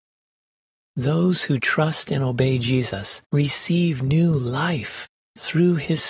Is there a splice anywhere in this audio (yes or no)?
yes